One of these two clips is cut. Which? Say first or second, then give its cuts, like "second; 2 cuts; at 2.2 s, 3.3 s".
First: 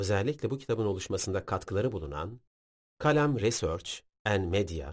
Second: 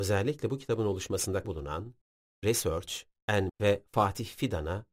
second; 3 cuts; at 1.4 s, 2.4 s, 3.5 s